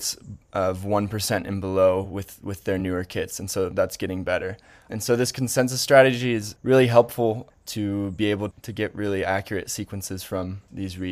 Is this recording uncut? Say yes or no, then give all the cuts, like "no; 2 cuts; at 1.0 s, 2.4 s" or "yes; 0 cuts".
yes; 0 cuts